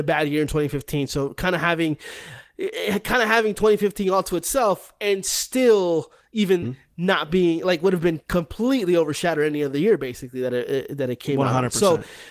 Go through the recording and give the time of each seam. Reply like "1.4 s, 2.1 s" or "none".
6.6 s